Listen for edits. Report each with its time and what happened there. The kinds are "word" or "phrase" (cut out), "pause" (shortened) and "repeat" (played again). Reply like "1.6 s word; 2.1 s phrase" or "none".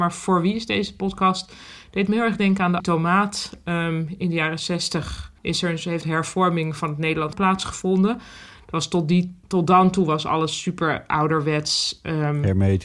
2.8 s word; 5.4 s pause; 6.0 s phrase; 7.3 s word; 9.4 s pause